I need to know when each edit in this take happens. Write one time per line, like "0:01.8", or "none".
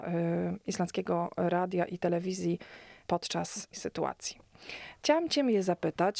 0:03.7